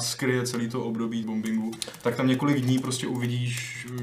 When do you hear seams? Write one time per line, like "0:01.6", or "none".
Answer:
0:01.2